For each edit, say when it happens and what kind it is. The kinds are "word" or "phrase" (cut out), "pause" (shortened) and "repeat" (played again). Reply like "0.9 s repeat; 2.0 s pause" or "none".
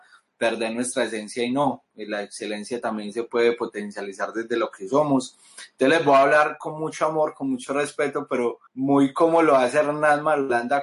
8.7 s pause